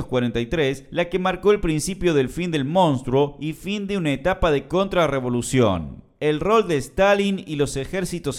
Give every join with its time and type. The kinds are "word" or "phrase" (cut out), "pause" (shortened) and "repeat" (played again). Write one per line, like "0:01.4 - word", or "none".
none